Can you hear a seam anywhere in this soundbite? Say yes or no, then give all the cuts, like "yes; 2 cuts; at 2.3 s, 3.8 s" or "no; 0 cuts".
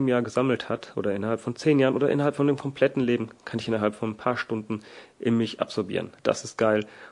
yes; 1 cut; at 6.2 s